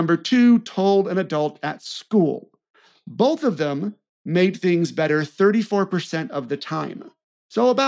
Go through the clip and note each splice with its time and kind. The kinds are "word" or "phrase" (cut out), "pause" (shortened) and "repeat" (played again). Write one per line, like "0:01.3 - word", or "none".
none